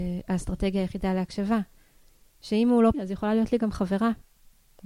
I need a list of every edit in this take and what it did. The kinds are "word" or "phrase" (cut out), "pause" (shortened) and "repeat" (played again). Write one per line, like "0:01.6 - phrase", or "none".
0:02.9 - word